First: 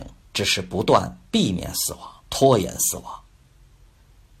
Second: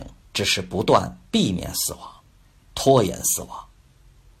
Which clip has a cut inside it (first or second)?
first